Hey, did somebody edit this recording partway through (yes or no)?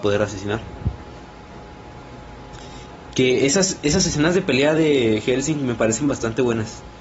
no